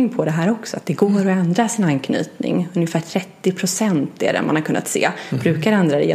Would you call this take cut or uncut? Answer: uncut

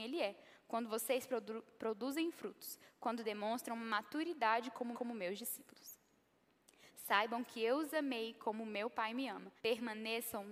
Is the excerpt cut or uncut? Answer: cut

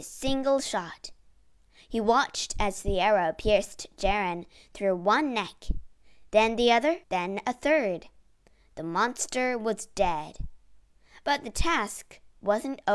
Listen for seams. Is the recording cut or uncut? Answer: cut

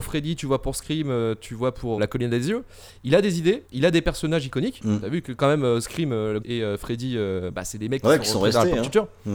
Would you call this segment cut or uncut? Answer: cut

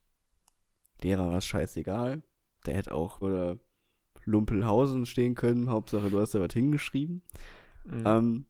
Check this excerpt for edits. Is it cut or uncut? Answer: cut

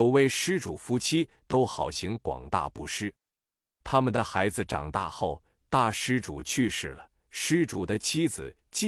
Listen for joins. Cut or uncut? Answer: uncut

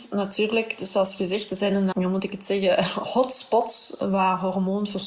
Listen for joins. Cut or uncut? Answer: cut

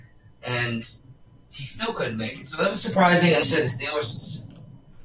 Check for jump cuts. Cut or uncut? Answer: cut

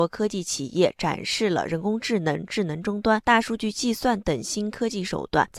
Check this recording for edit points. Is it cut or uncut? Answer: uncut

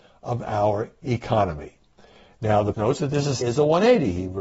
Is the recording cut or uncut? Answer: cut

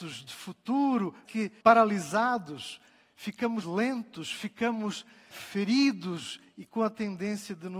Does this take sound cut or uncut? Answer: cut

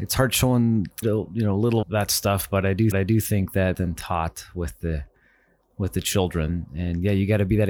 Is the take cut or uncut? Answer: cut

